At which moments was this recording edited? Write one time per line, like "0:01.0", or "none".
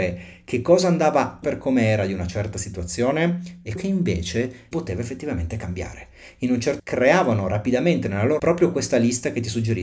0:01.4
0:03.8
0:04.7
0:06.8
0:08.4